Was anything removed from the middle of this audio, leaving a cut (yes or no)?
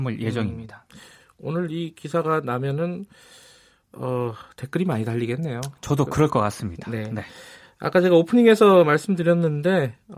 no